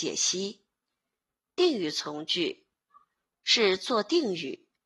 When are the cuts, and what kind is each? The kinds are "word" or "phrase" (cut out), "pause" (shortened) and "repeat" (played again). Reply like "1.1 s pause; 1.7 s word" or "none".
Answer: none